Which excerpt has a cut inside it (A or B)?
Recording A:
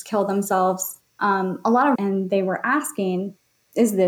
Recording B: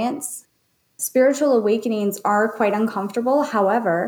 A